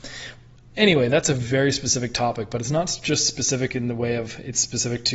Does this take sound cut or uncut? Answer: uncut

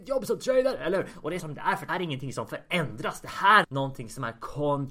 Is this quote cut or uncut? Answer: cut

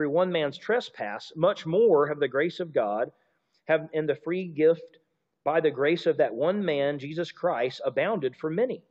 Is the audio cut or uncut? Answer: uncut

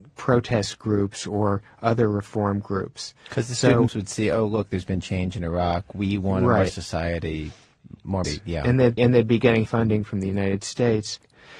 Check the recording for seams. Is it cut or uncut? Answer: cut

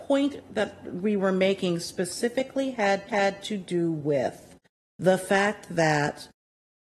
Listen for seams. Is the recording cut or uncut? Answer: cut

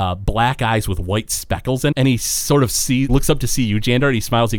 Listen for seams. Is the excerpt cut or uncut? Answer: cut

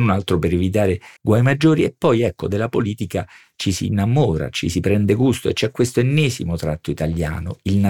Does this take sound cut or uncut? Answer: cut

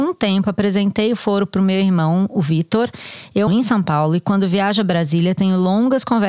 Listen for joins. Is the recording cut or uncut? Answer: cut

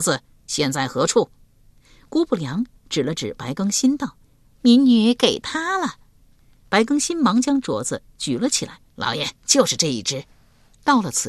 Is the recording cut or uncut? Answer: cut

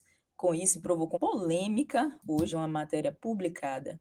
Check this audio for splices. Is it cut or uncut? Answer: cut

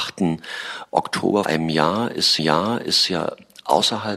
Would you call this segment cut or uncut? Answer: cut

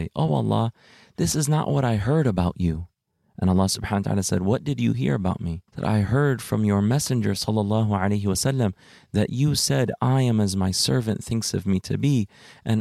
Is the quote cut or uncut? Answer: cut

